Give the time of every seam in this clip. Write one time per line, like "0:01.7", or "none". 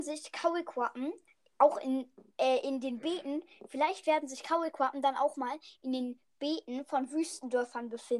none